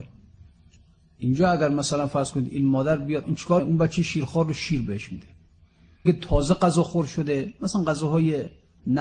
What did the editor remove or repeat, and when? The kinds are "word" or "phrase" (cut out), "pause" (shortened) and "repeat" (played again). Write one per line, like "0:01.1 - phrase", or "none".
0:03.2 - word
0:03.6 - word
0:06.1 - word